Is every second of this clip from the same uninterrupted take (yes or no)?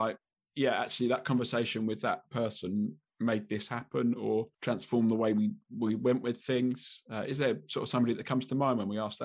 no